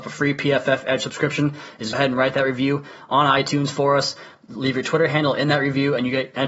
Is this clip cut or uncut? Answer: cut